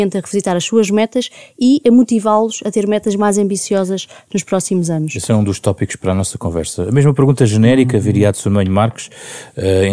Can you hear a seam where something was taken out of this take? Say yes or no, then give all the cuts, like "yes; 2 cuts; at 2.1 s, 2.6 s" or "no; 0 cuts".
no; 0 cuts